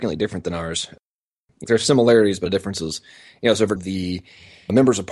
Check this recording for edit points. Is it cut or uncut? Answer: cut